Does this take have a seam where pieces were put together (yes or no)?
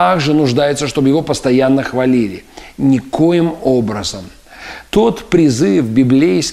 yes